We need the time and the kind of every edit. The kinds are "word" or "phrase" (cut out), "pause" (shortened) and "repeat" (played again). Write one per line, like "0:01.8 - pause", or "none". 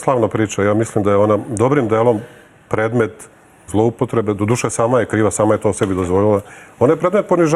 0:03.7 - word